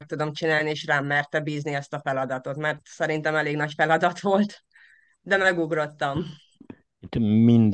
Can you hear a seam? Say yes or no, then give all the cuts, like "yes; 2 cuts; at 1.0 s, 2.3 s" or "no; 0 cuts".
no; 0 cuts